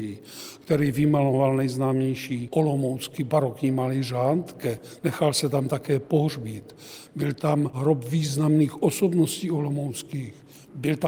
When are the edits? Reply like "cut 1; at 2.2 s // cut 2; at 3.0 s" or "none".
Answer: none